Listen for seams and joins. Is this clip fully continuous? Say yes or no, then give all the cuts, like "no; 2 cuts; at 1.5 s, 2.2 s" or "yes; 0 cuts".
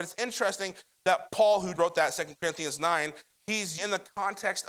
no; 2 cuts; at 1.8 s, 3.8 s